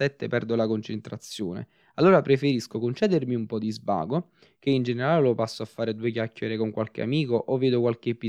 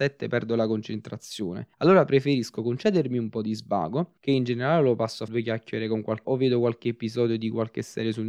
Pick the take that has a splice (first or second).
second